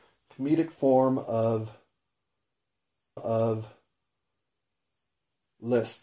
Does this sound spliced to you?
yes; 1 cut; at 3.2 s

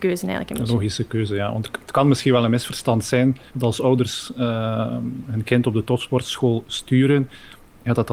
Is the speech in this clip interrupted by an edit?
yes; 1 cut; at 3.5 s

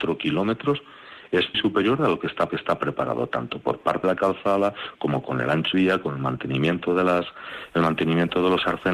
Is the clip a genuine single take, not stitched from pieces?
no; 4 cuts; at 1.5 s, 2.5 s, 4.0 s, 5.7 s

